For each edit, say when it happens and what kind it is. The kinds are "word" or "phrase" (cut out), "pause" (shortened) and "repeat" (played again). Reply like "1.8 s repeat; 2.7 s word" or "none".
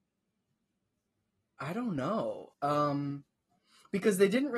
2.5 s pause